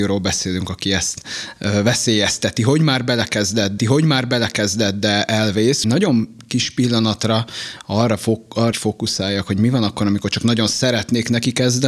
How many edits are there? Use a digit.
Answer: 3